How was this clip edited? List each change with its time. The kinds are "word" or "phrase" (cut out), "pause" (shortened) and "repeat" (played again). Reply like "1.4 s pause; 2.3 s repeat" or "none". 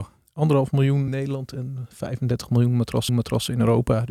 1.1 s word; 3.1 s repeat